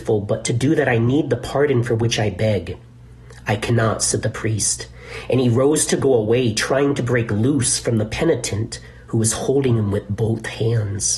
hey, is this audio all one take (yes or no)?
yes